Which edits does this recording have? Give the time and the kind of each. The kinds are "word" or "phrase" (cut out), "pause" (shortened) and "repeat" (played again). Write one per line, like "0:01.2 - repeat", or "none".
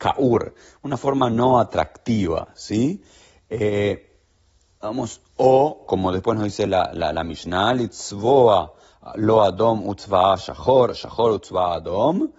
none

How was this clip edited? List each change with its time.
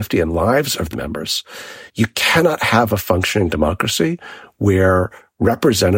0:00.9 - phrase
0:01.9 - pause

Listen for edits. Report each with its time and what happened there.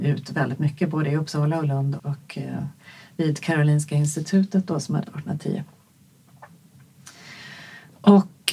0:02.0 - word
0:05.0 - word

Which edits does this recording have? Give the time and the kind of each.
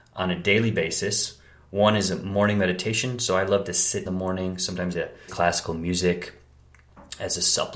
0:04.1 - phrase
0:04.9 - phrase
0:05.3 - word

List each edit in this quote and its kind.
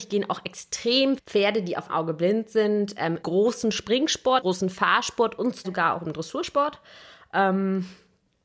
0:01.2 - word
0:01.9 - word
0:03.2 - word
0:04.4 - word
0:05.6 - word

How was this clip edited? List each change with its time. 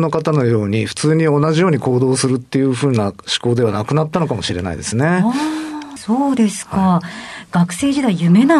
0:06.0 - phrase

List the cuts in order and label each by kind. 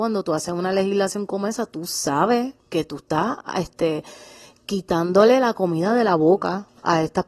0:02.6 - pause

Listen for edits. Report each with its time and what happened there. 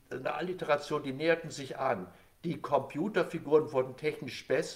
none

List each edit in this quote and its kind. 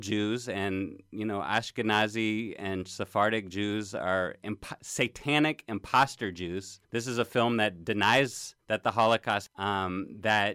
0:06.8 - pause
0:08.6 - pause
0:09.5 - word

